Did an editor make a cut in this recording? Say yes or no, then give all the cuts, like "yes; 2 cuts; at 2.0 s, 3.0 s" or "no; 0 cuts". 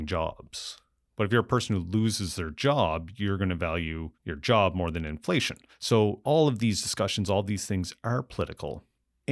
yes; 2 cuts; at 4.1 s, 5.7 s